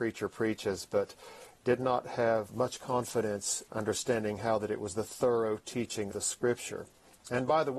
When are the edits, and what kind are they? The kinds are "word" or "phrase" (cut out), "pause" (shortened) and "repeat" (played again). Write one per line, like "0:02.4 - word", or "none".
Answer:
0:02.5 - word
0:03.7 - word
0:06.1 - word